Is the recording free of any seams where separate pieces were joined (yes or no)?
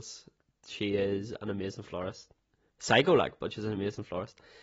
yes